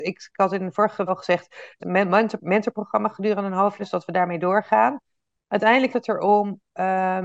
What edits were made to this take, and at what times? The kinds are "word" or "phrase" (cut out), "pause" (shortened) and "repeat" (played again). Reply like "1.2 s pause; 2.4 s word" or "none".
1.1 s word; 1.8 s word; 3.8 s word; 5.9 s word